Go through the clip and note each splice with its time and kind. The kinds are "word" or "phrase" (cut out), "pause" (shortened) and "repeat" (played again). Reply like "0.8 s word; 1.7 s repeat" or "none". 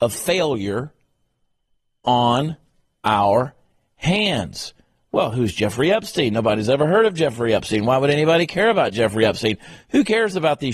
none